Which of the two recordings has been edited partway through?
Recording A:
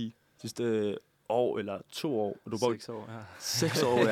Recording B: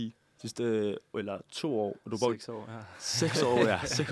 B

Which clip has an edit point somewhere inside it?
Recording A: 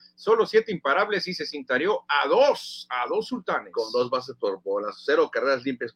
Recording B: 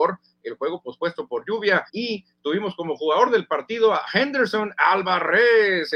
B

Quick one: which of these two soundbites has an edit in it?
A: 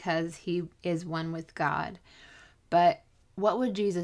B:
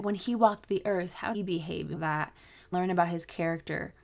B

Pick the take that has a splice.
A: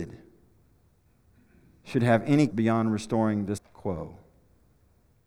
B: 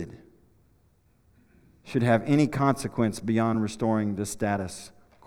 A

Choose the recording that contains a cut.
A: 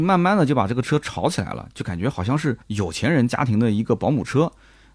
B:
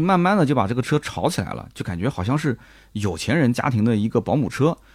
A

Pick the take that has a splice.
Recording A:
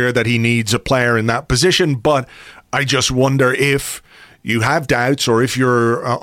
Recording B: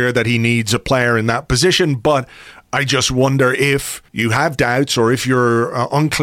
B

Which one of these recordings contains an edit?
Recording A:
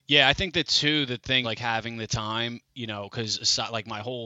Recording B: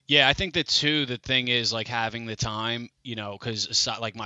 A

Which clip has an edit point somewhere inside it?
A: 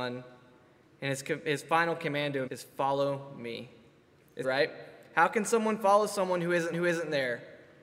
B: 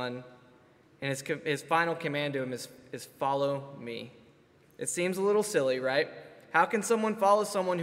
A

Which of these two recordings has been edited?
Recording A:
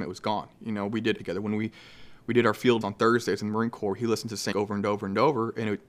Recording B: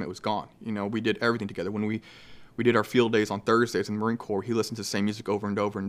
A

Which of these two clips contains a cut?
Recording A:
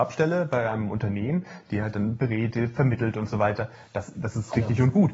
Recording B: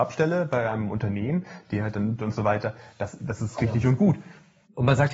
B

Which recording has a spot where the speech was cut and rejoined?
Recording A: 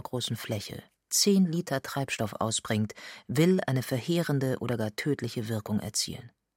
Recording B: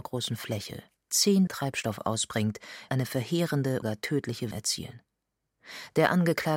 B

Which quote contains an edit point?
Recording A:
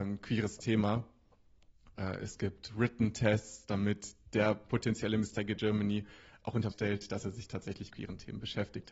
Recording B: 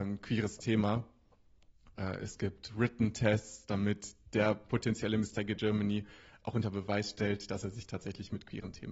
A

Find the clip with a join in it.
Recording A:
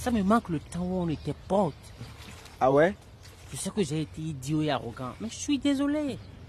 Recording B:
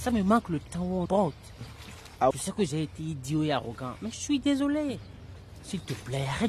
B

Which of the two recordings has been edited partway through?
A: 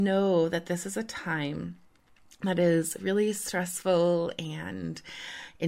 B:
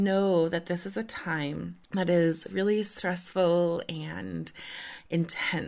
B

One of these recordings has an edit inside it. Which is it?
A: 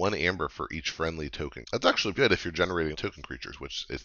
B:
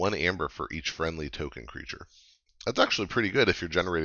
A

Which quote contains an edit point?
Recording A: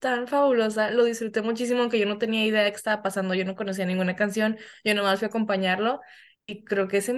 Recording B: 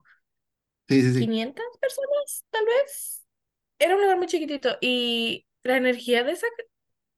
B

